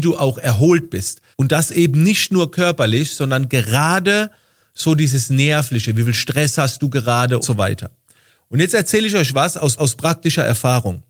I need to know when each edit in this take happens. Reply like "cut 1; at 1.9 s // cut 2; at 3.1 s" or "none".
cut 1; at 1.3 s // cut 2; at 7.4 s // cut 3; at 9.8 s